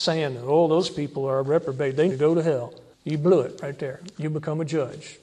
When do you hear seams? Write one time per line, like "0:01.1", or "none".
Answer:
0:02.1
0:02.9